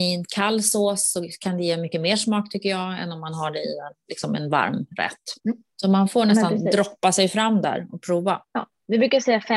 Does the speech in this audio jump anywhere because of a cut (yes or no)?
yes